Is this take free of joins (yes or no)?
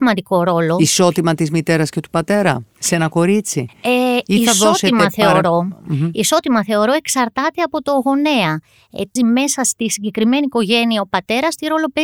no